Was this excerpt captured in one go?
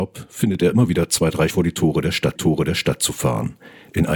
no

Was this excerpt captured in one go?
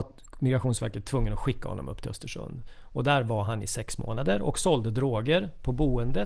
yes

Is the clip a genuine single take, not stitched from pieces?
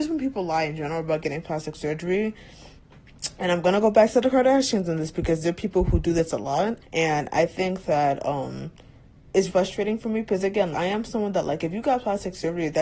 no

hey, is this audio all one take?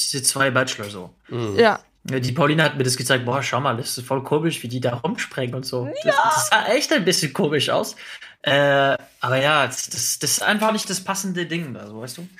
yes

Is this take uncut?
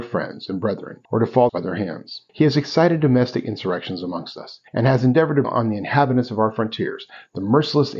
no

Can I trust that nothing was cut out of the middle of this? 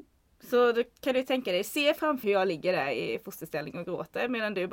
no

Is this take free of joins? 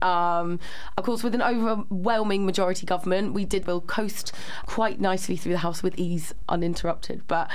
no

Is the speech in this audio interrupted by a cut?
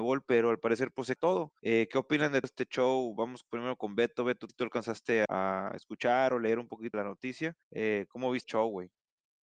yes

